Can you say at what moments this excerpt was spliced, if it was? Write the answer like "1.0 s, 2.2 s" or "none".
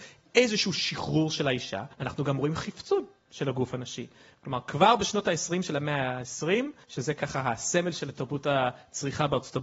1.9 s